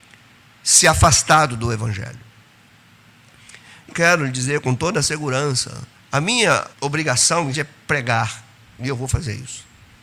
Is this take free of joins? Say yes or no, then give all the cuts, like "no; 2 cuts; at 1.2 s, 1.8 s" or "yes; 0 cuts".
no; 4 cuts; at 3.9 s, 5.9 s, 6.7 s, 7.5 s